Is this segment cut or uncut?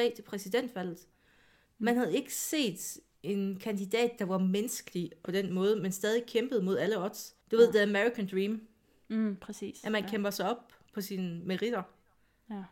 cut